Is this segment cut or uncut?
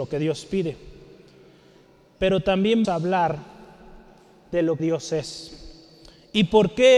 cut